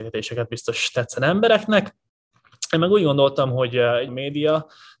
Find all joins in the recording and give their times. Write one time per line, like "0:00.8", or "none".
0:04.1